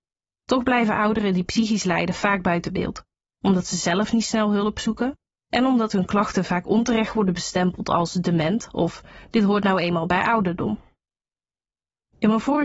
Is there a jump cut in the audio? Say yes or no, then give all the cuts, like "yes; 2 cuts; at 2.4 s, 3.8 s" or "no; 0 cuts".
no; 0 cuts